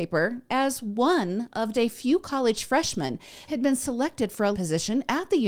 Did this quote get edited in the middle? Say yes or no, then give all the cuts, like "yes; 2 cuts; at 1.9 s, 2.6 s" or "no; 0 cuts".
yes; 3 cuts; at 1.7 s, 3.5 s, 4.5 s